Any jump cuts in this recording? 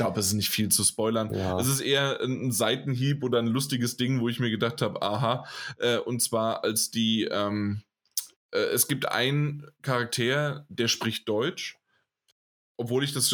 no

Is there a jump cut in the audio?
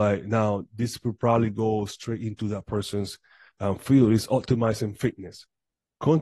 no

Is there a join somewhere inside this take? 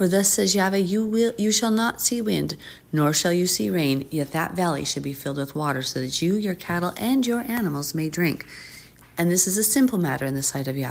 no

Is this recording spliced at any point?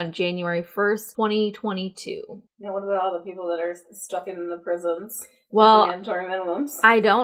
no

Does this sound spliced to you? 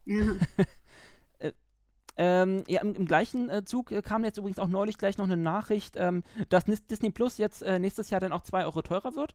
no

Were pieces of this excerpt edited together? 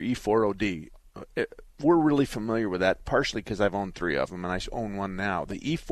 no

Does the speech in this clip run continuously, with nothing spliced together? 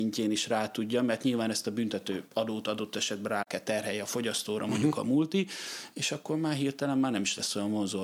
yes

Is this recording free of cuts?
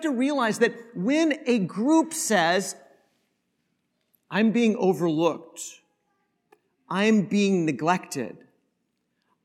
yes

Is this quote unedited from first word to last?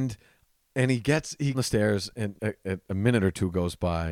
no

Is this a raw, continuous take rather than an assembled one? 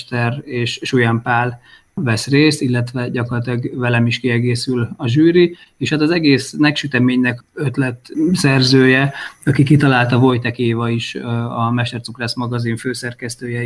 yes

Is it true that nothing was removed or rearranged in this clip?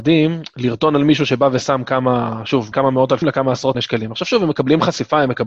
no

